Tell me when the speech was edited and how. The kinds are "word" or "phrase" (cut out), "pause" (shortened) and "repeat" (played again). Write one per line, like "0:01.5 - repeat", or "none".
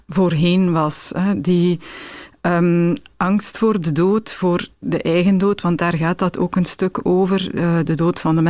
none